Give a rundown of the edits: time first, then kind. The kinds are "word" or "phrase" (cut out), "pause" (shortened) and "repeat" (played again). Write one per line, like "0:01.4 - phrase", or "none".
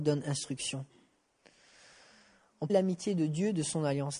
0:02.7 - phrase